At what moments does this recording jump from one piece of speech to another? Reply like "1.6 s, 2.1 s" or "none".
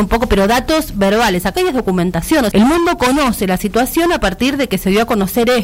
1.5 s, 2.5 s